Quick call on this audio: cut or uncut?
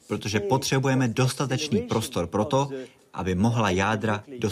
uncut